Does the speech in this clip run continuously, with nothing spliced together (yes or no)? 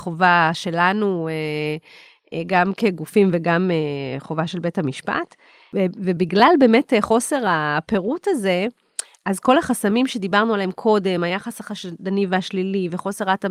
yes